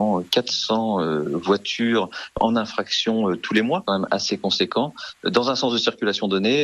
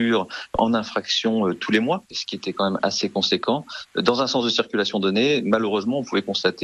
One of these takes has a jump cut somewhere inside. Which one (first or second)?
first